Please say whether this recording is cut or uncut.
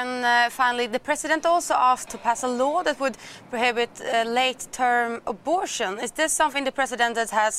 cut